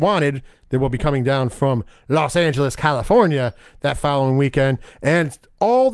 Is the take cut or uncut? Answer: uncut